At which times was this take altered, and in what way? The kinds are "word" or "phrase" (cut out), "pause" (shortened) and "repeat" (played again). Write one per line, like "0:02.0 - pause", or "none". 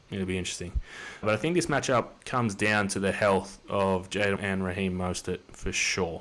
0:02.2 - pause
0:04.4 - word

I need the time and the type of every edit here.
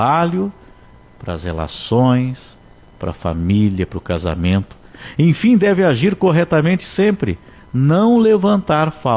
none

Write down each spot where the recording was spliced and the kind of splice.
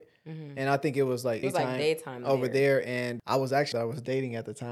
0:01.4 - word
0:03.7 - phrase

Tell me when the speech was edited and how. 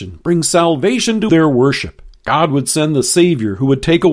0:01.3 - phrase

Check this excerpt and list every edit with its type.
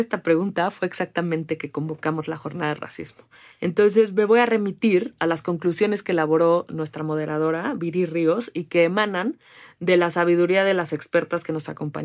none

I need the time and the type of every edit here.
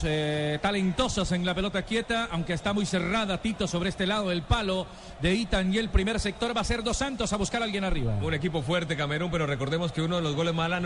none

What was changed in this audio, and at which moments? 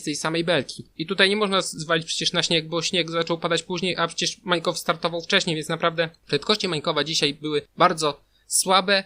0:00.9 - pause
0:06.2 - pause

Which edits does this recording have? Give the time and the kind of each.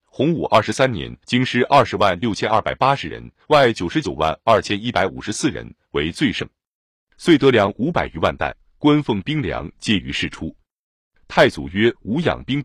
0:01.2 - pause
0:03.4 - pause

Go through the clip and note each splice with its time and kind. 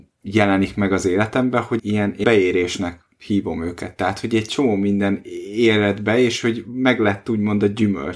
0:01.8 - word
0:02.2 - word

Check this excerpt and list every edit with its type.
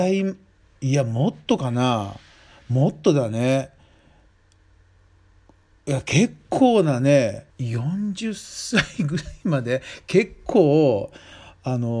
0:07.5 - pause

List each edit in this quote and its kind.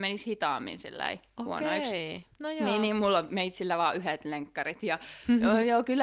0:02.3 - pause

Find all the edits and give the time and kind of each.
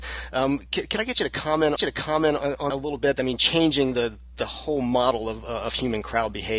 0:01.8 - repeat
0:02.7 - word

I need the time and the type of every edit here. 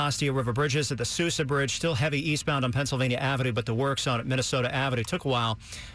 none

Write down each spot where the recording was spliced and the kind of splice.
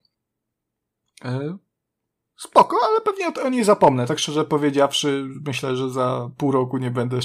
none

